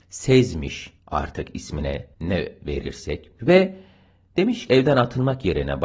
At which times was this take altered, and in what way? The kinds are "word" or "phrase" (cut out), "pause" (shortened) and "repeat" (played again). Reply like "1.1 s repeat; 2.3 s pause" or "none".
1.0 s pause; 2.1 s pause; 3.4 s word; 4.7 s word